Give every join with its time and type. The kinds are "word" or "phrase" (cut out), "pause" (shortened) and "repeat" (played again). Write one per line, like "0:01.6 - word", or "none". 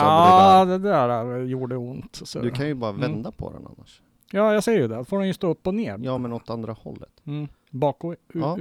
none